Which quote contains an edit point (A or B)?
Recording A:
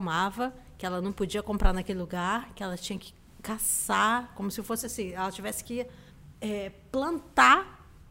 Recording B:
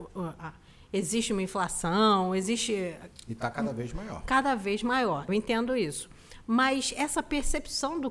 B